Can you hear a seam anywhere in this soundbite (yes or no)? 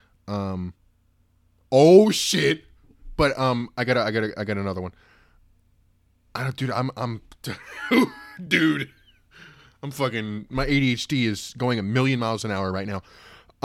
no